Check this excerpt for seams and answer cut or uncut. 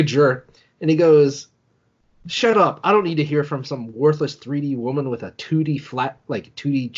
uncut